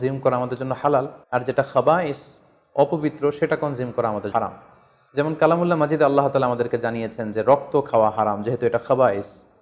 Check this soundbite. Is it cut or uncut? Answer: cut